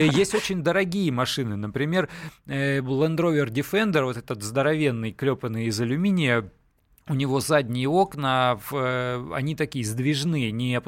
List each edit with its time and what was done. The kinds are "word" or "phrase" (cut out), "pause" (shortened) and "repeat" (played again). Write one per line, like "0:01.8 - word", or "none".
none

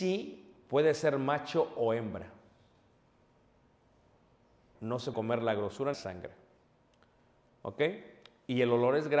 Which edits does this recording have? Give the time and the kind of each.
0:04.8 - word
0:05.1 - word
0:05.9 - phrase

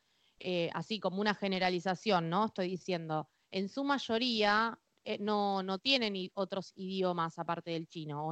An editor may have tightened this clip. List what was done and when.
none

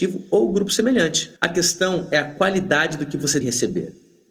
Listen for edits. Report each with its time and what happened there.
0:01.4 - pause
0:03.4 - word

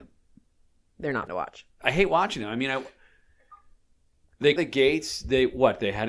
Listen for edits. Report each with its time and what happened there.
0:01.3 - word
0:04.6 - phrase

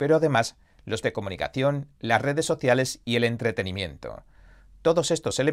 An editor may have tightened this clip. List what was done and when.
0:01.0 - word

